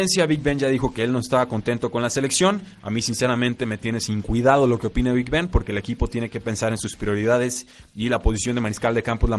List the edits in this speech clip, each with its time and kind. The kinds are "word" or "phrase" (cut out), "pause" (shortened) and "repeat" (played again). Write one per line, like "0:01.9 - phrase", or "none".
none